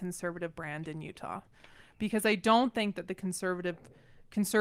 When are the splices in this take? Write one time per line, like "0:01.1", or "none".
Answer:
none